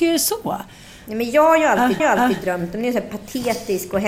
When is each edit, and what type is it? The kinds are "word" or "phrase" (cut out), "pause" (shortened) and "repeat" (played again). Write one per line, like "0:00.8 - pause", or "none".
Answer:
0:02.0 - repeat